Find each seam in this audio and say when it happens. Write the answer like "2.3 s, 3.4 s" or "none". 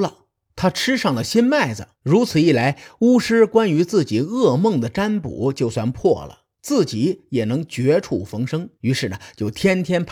1.9 s, 6.5 s, 8.8 s